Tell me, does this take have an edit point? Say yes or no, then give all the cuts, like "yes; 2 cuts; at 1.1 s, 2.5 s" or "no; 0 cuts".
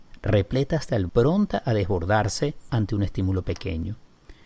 yes; 2 cuts; at 1.1 s, 2.7 s